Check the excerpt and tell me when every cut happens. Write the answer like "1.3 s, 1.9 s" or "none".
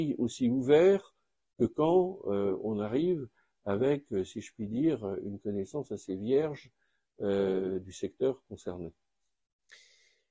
none